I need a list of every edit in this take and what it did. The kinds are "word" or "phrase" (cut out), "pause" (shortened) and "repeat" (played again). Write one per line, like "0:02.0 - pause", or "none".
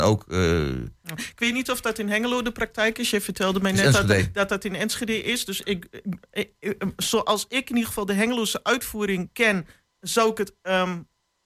none